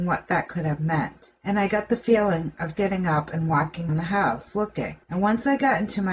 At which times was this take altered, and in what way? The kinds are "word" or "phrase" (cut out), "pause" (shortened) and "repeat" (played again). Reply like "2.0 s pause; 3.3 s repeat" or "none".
1.4 s pause; 2.7 s word; 3.9 s word; 5.0 s pause